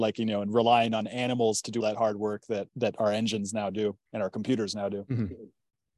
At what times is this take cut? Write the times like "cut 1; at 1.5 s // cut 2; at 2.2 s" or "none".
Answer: cut 1; at 1.8 s // cut 2; at 2.7 s // cut 3; at 4.1 s